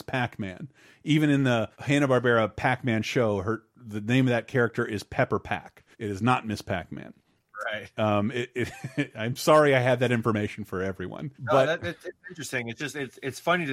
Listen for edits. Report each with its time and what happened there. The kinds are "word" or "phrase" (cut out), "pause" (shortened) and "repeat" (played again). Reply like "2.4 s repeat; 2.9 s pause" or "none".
1.7 s pause; 5.9 s pause; 11.3 s pause